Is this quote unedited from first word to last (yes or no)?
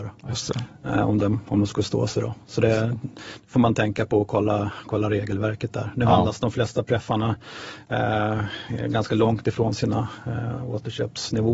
yes